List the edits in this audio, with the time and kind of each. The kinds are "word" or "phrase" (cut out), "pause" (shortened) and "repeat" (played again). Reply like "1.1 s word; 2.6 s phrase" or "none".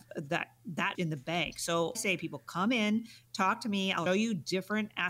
0.9 s word; 1.9 s phrase; 4.1 s word